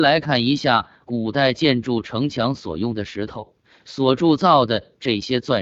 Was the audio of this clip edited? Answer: no; 0 cuts

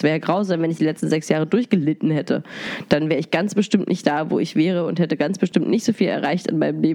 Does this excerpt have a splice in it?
no; 0 cuts

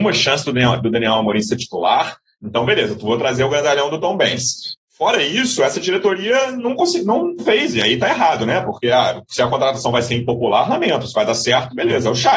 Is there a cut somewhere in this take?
yes; 1 cut; at 7.4 s

